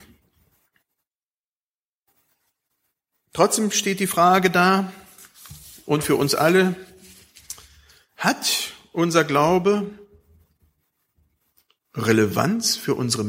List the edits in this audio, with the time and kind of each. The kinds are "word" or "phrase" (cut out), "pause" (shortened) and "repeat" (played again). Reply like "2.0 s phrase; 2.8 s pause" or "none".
none